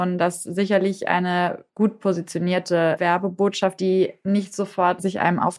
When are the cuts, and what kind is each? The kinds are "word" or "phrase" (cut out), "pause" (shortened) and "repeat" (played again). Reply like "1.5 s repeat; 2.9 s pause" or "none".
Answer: 3.8 s word